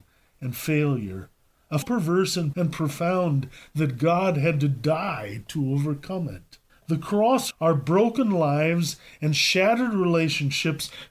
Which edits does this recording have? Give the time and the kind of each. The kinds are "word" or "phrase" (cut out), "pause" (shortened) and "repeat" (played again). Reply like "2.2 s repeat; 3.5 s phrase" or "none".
1.8 s phrase; 2.5 s word; 6.7 s pause; 7.5 s word